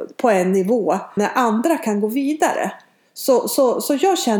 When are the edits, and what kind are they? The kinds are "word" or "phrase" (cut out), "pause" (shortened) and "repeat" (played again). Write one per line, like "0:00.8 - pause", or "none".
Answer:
0:01.2 - word